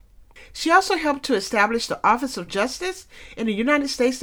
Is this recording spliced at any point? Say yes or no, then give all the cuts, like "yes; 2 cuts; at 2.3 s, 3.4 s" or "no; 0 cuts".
yes; 1 cut; at 2.5 s